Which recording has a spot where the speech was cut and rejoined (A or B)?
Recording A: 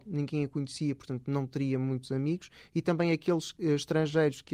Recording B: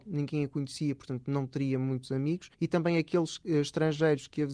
B